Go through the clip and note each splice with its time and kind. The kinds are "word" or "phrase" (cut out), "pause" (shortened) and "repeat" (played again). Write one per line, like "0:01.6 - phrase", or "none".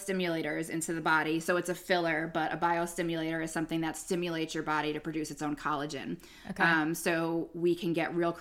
none

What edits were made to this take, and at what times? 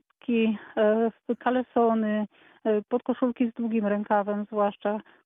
none

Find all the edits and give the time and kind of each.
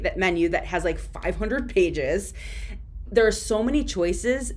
0:03.1 - word

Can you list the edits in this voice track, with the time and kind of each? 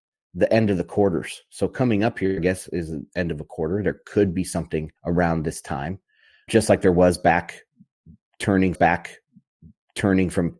0:05.0 - pause
0:06.5 - word
0:08.7 - repeat

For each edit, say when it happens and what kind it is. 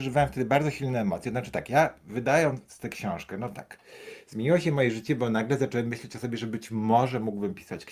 none

